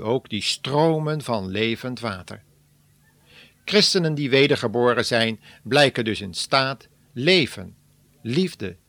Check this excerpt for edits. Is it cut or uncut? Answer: uncut